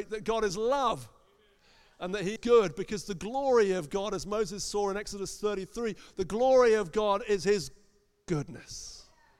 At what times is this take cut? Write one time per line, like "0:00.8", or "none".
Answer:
0:02.4